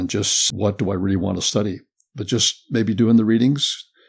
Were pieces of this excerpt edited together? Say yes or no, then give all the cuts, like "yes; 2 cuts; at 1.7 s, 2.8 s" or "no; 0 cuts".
no; 0 cuts